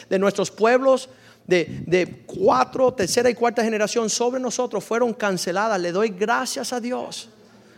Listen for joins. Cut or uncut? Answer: uncut